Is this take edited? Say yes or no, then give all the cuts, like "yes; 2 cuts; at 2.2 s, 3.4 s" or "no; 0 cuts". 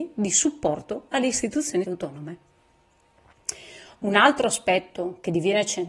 yes; 1 cut; at 1.8 s